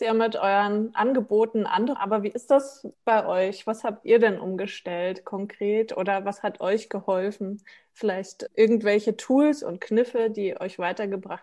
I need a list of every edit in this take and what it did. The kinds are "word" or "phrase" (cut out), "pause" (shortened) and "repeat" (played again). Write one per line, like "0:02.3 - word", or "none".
0:02.0 - word
0:02.9 - pause
0:08.5 - word